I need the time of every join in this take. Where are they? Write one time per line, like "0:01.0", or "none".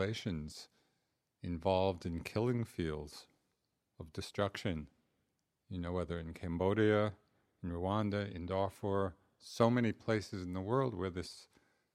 none